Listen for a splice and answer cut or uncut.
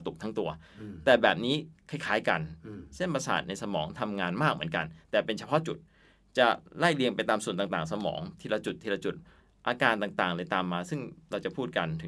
uncut